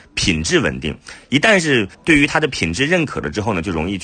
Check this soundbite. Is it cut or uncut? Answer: cut